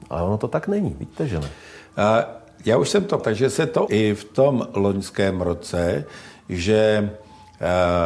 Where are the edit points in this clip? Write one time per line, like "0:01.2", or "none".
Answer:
0:03.2
0:03.9